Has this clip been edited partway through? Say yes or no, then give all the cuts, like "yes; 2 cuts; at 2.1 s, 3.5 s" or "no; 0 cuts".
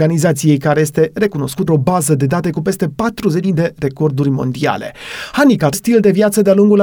yes; 3 cuts; at 1.7 s, 3.4 s, 5.7 s